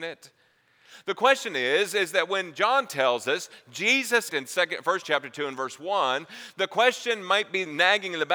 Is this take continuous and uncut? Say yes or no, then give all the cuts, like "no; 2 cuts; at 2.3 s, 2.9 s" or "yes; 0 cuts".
no; 2 cuts; at 4.3 s, 5.0 s